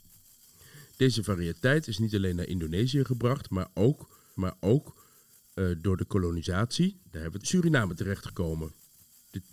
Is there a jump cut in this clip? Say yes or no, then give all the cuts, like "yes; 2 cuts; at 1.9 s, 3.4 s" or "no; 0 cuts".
yes; 2 cuts; at 4.4 s, 7.4 s